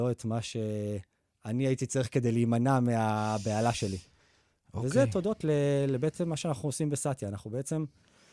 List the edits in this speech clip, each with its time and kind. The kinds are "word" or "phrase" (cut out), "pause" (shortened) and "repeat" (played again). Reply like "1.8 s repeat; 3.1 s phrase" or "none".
none